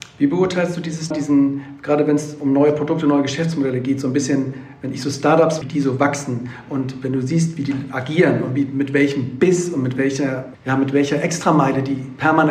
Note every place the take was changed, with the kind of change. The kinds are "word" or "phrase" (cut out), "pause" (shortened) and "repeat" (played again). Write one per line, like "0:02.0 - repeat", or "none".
0:01.1 - word
0:05.6 - word
0:10.5 - word